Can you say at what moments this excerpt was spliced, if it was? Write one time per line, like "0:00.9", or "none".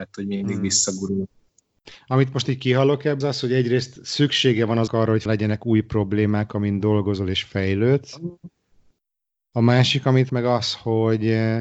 0:03.2
0:04.9
0:05.3
0:10.3